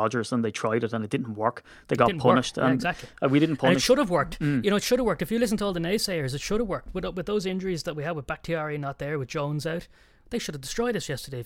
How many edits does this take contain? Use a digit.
0